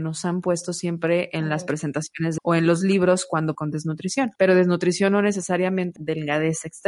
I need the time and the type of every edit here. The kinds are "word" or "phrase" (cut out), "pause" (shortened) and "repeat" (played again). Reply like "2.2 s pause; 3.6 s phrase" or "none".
2.4 s word; 3.5 s phrase; 4.4 s pause; 6.0 s word